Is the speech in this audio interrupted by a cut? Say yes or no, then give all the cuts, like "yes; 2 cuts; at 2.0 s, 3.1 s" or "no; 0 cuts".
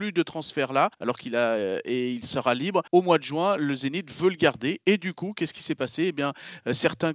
yes; 2 cuts; at 0.9 s, 2.9 s